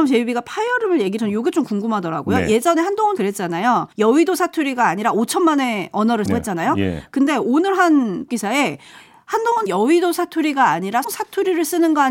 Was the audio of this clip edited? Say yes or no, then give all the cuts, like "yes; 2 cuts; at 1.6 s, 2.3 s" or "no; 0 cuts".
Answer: yes; 7 cuts; at 1.2 s, 3.2 s, 3.9 s, 6.3 s, 8.3 s, 9.7 s, 11.0 s